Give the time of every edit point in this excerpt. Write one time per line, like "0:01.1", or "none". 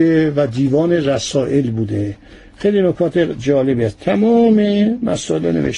none